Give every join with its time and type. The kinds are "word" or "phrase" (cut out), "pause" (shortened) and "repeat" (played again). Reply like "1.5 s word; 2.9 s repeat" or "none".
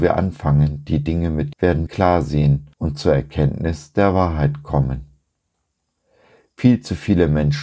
1.5 s phrase; 1.9 s word; 2.7 s pause